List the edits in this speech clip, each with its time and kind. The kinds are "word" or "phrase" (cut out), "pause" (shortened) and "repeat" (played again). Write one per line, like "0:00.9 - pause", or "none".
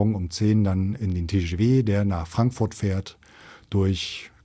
none